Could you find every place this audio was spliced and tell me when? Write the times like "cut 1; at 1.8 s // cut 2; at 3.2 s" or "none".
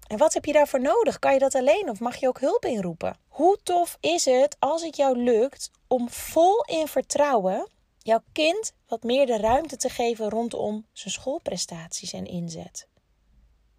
cut 1; at 3.2 s // cut 2; at 7.9 s